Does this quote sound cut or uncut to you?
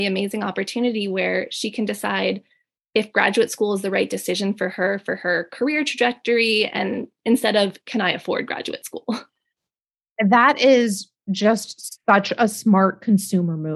uncut